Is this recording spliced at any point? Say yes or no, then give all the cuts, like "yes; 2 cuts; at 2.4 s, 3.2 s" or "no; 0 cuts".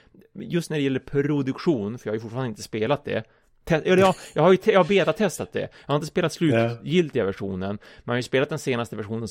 no; 0 cuts